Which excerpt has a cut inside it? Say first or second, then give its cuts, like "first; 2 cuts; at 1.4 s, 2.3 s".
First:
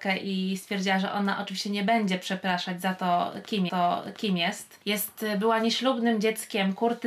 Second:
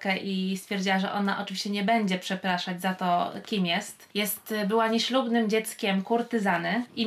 first; 1 cut; at 3.7 s